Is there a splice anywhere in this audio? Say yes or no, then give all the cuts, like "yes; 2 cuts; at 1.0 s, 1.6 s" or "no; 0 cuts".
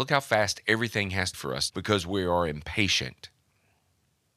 yes; 2 cuts; at 1.3 s, 1.7 s